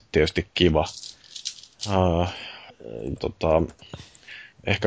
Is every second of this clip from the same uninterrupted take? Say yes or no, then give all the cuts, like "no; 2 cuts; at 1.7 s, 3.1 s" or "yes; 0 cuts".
no; 1 cut; at 3.2 s